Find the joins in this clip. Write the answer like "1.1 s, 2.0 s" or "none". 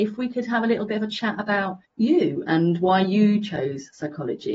none

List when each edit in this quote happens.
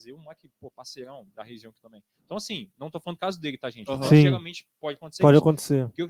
none

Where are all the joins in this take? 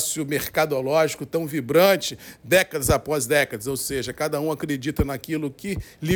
none

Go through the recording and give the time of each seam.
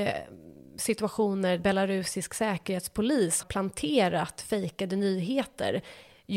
1.6 s, 3.4 s

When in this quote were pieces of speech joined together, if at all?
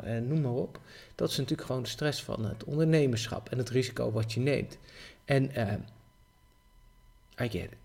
none

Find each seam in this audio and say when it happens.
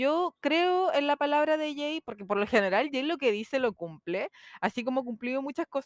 none

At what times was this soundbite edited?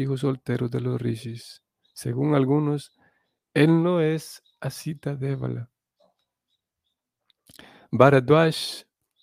none

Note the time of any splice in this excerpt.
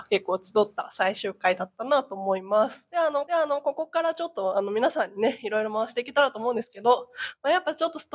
3.3 s

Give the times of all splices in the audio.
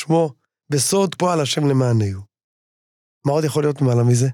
1.2 s

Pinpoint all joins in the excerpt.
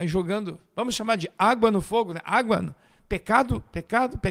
none

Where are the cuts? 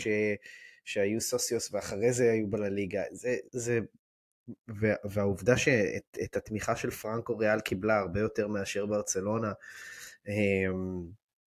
3.5 s

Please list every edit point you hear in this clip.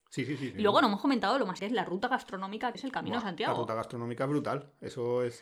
1.6 s, 2.7 s

